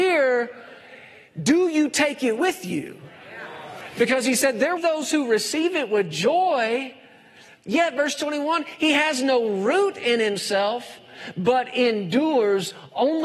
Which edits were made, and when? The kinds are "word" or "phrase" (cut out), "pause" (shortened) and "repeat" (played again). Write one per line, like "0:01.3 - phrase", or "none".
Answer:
0:04.8 - phrase